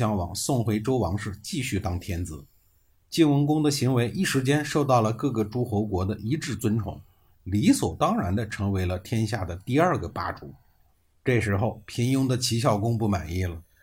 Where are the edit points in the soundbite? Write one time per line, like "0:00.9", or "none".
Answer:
none